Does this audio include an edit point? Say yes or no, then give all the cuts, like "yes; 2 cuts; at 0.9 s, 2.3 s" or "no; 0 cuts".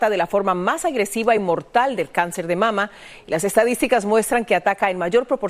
no; 0 cuts